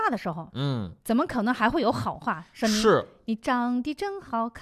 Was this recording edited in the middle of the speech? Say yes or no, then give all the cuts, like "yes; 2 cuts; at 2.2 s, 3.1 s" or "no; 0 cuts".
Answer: yes; 1 cut; at 1.0 s